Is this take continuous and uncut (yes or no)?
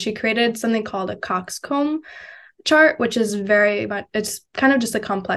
yes